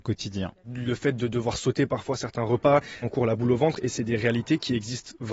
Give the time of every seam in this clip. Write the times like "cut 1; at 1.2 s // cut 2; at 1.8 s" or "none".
cut 1; at 3.0 s